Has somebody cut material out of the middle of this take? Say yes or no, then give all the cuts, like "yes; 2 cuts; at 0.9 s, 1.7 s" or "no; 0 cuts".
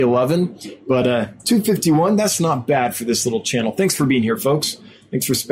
no; 0 cuts